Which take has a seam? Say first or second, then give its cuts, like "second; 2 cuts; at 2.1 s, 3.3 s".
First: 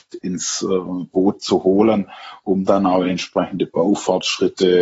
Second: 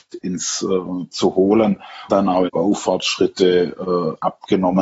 second; 3 cuts; at 1.1 s, 2.1 s, 2.5 s